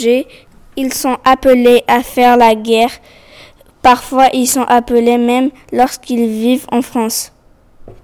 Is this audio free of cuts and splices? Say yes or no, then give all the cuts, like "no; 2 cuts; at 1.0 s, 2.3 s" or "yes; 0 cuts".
yes; 0 cuts